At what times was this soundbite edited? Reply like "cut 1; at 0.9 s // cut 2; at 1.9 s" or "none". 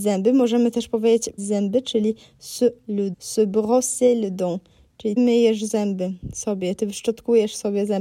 cut 1; at 1.4 s // cut 2; at 2.8 s // cut 3; at 3.1 s // cut 4; at 5.2 s

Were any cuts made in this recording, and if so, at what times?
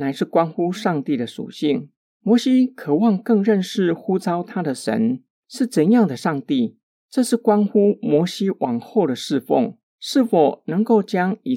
none

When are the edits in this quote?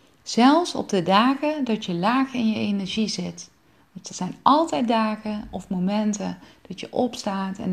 none

